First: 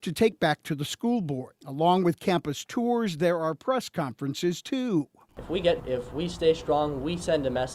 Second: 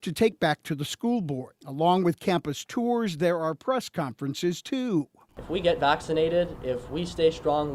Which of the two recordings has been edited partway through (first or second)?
first